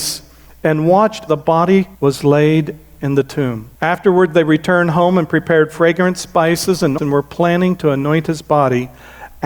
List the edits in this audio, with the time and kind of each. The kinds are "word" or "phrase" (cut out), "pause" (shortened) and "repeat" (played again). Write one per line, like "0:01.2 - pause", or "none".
0:01.3 - word
0:01.9 - pause
0:03.8 - pause
0:07.0 - word